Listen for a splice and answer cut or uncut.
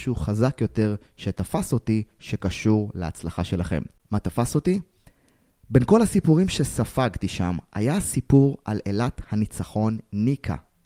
uncut